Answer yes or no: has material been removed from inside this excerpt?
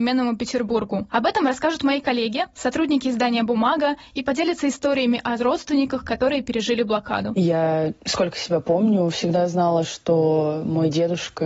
no